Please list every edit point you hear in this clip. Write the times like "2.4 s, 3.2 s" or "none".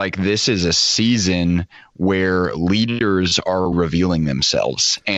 3.7 s